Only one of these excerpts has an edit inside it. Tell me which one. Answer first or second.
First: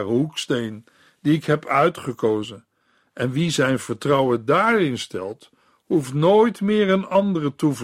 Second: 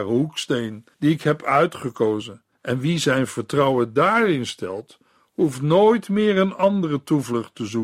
second